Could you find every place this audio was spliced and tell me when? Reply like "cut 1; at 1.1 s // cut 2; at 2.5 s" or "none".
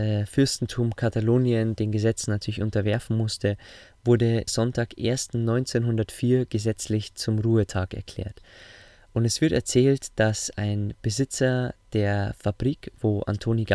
cut 1; at 4.5 s

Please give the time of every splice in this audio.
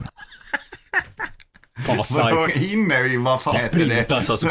cut 1; at 2.5 s // cut 2; at 3.5 s

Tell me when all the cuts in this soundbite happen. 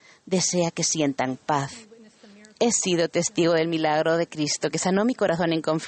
none

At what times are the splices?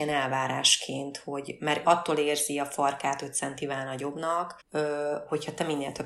cut 1; at 1.8 s // cut 2; at 4.6 s

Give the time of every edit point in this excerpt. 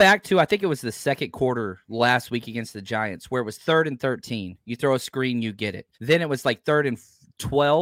cut 1; at 5.9 s

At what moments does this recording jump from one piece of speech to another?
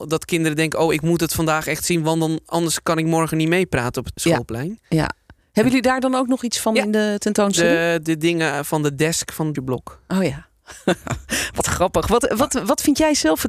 cut 1; at 4.2 s // cut 2; at 9.6 s

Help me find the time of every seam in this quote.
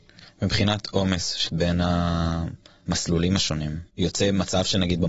cut 1; at 1.5 s // cut 2; at 3.9 s

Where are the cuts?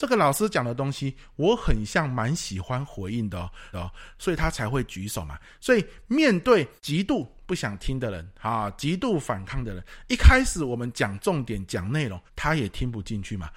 cut 1; at 3.7 s // cut 2; at 6.8 s // cut 3; at 12.3 s

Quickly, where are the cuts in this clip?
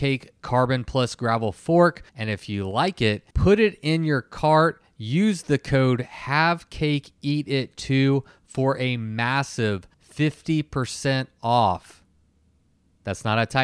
cut 1; at 2.1 s // cut 2; at 3.3 s // cut 3; at 9.9 s

